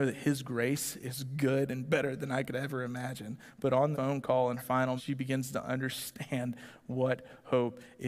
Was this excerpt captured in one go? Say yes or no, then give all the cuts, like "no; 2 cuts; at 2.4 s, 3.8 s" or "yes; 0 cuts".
no; 3 cuts; at 3.9 s, 4.6 s, 5.0 s